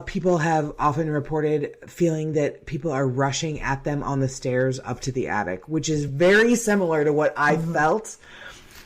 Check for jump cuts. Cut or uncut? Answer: uncut